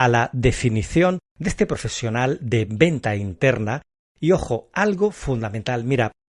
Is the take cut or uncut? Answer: uncut